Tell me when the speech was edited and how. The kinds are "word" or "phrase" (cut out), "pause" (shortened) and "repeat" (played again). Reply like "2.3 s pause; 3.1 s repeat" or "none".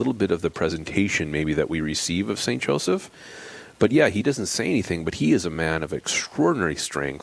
none